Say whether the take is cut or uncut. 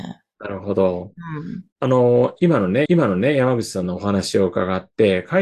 cut